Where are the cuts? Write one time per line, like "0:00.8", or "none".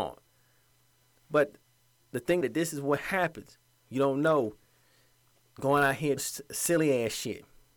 0:02.4
0:06.2